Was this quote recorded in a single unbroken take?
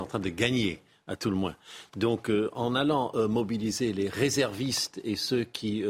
yes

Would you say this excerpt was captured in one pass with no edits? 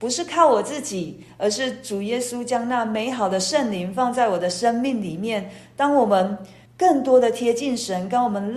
no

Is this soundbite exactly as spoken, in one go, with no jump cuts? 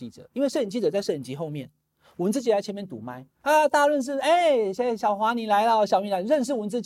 no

